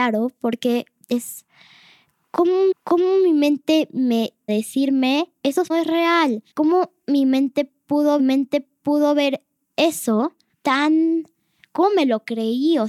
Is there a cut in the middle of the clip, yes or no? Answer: yes